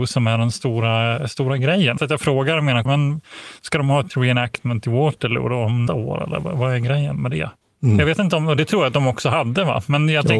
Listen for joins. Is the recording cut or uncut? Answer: cut